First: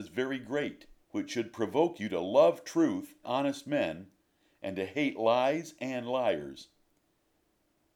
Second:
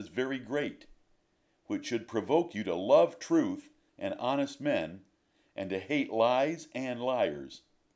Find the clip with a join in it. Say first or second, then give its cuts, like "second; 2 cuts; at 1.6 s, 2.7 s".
first; 2 cuts; at 1.0 s, 3.2 s